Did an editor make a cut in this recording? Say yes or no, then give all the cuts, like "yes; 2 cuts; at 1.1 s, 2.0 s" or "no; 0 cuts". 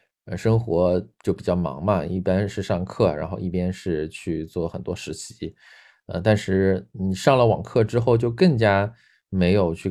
no; 0 cuts